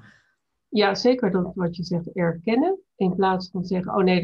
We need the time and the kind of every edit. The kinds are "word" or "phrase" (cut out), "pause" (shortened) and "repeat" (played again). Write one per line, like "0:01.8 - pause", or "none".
0:02.9 - pause